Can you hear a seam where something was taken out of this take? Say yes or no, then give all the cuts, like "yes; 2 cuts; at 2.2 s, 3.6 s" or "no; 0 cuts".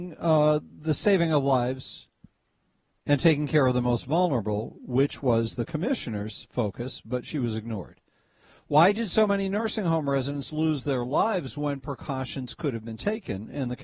no; 0 cuts